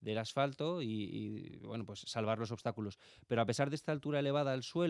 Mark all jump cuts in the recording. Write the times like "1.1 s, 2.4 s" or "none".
none